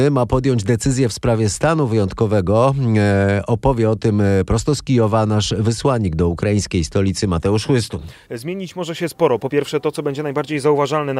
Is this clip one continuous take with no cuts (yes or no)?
yes